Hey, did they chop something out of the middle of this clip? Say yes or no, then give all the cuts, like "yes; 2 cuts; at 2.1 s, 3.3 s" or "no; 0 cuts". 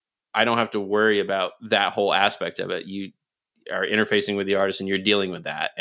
no; 0 cuts